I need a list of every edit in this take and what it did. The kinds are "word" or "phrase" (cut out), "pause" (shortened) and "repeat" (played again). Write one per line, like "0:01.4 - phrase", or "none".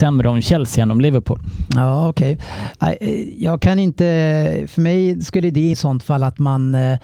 0:05.7 - word